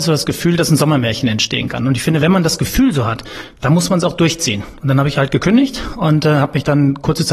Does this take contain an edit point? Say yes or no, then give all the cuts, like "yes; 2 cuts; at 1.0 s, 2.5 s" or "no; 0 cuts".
no; 0 cuts